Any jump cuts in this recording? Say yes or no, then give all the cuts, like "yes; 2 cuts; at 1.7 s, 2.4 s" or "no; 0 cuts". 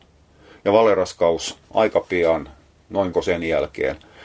yes; 2 cuts; at 1.6 s, 3.1 s